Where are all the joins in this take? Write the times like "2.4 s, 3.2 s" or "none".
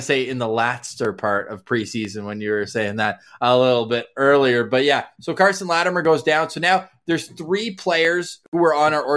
none